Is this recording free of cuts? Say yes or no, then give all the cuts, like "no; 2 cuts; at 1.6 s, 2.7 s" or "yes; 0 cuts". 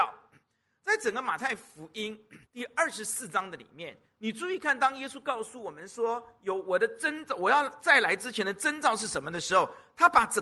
no; 1 cut; at 2.4 s